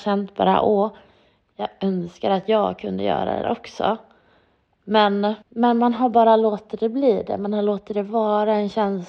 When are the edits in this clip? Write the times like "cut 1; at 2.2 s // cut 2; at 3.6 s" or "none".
cut 1; at 3.4 s // cut 2; at 5.4 s